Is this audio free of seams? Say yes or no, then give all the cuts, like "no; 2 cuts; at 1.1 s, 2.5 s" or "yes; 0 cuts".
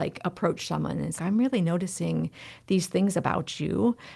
no; 1 cut; at 1.2 s